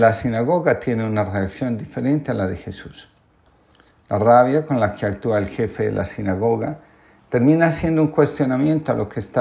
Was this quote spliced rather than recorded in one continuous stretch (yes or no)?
no